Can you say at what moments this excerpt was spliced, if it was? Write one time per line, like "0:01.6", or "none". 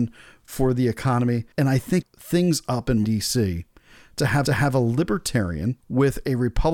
0:01.5
0:02.0
0:03.0
0:04.4
0:05.8

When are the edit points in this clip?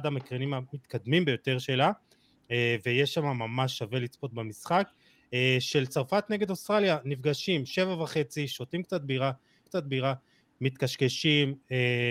0:09.7

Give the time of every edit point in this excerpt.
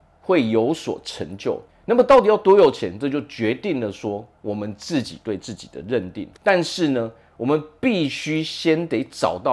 0:01.7
0:06.4

